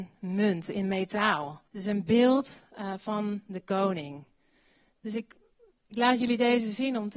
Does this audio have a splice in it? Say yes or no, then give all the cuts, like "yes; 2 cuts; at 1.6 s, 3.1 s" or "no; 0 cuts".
yes; 1 cut; at 1.7 s